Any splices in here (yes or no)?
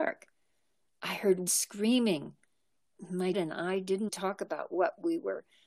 yes